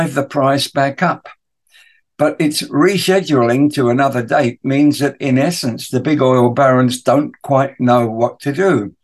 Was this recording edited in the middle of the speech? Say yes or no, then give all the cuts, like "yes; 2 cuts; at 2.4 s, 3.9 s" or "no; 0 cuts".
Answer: no; 0 cuts